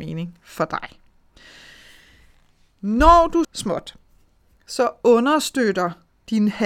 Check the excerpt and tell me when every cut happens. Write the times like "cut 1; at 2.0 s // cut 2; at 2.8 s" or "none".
cut 1; at 3.4 s